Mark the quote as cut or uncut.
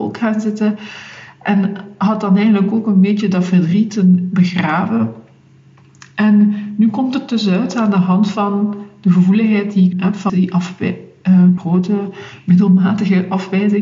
cut